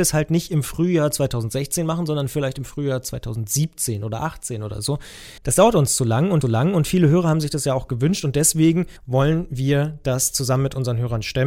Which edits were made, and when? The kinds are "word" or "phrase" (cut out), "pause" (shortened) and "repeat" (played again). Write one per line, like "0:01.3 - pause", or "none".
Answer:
0:05.4 - pause
0:06.4 - repeat
0:09.0 - pause